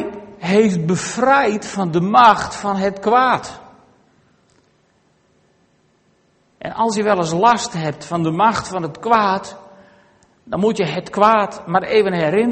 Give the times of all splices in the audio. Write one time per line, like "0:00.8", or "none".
none

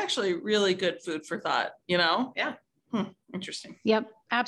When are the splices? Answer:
0:01.8
0:02.6

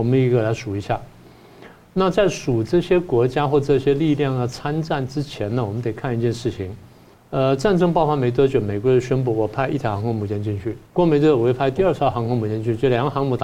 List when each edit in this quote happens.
0:07.1
0:10.9

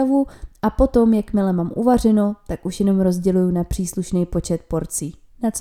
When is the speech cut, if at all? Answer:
none

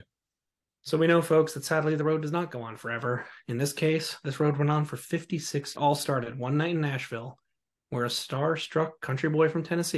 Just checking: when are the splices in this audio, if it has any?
0:05.7

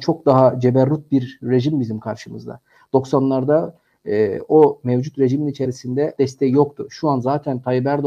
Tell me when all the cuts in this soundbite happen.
0:06.2

